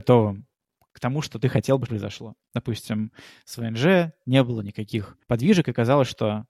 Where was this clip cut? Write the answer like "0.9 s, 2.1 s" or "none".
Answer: 1.9 s, 5.2 s